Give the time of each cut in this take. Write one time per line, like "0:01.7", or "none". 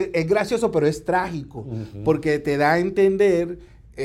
none